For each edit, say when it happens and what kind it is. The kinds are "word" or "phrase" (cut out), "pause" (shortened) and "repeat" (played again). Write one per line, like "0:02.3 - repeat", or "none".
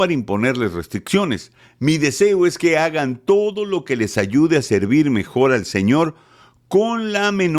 none